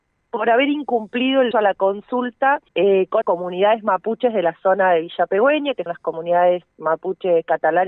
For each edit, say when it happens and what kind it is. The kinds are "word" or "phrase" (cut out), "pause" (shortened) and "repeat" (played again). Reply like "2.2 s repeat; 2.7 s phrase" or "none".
1.5 s word; 2.7 s pause; 3.2 s word; 5.9 s word